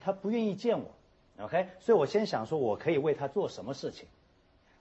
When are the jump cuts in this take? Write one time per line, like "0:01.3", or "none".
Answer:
none